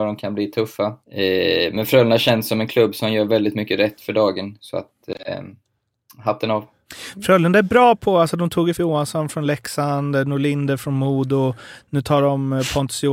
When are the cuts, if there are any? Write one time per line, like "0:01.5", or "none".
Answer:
0:01.0
0:08.7